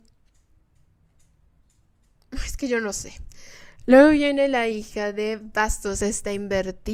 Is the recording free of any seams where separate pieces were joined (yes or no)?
yes